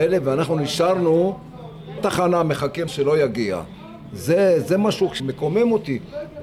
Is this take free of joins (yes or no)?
no